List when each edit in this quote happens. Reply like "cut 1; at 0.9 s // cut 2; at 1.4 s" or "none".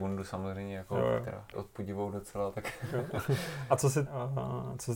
cut 1; at 1.5 s // cut 2; at 4.1 s